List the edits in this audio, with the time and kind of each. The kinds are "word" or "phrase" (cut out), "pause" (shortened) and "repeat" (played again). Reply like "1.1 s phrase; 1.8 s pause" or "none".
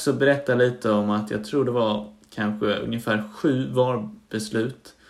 none

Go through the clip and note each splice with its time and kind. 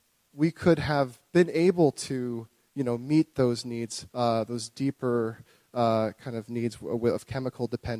4.1 s pause

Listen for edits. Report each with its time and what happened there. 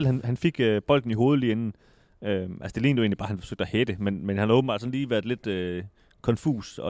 none

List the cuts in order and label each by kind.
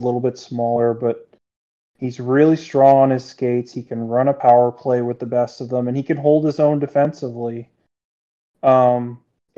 none

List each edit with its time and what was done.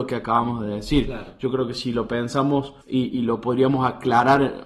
2.8 s pause

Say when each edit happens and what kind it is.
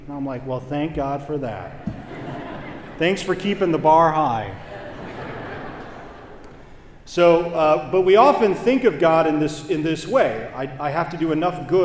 none

